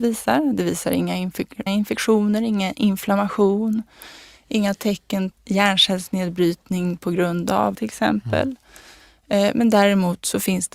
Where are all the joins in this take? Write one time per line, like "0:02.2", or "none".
0:01.7
0:05.3
0:07.7